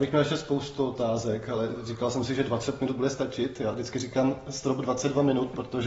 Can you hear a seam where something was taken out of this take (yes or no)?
no